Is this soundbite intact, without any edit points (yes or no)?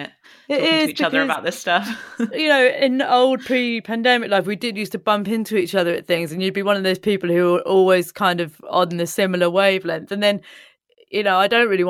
yes